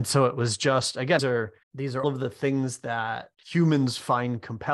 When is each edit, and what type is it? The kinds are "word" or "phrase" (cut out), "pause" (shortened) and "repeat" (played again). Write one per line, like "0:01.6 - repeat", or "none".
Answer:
0:01.2 - word
0:01.6 - pause
0:02.0 - word
0:03.3 - pause